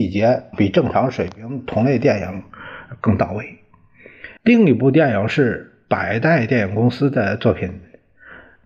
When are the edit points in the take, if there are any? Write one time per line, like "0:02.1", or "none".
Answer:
0:04.4